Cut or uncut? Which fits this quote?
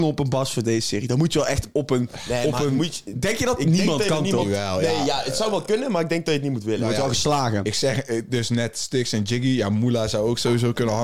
uncut